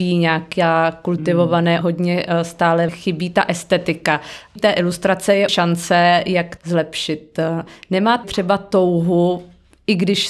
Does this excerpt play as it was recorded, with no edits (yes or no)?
no